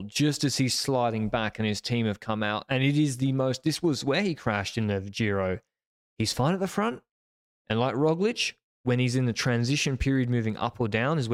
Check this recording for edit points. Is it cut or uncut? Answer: uncut